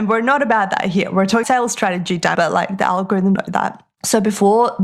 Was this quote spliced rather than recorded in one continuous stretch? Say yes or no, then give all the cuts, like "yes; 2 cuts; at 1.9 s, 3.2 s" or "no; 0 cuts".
yes; 3 cuts; at 1.4 s, 2.4 s, 3.4 s